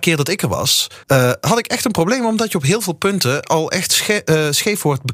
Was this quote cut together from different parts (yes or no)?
yes